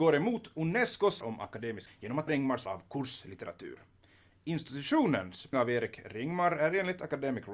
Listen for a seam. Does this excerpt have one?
yes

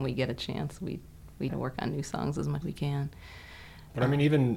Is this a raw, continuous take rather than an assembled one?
no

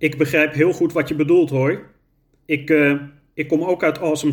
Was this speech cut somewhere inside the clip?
no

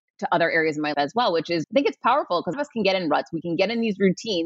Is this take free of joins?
no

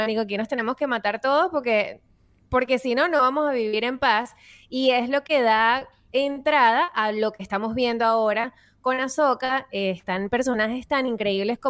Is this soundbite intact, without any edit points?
yes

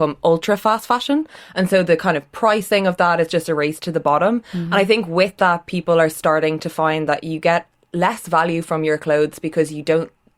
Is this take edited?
no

